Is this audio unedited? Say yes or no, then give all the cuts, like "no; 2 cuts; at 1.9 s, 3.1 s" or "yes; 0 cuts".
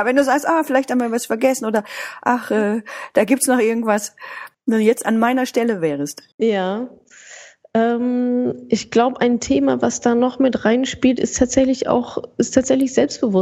no; 2 cuts; at 4.5 s, 6.3 s